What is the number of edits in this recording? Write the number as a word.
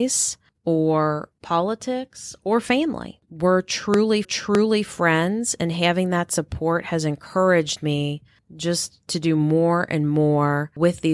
one